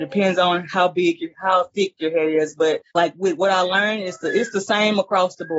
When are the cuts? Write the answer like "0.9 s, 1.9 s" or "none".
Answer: 2.9 s